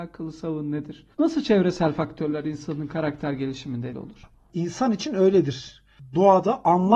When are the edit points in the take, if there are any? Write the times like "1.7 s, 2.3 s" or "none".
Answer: 1.1 s, 3.9 s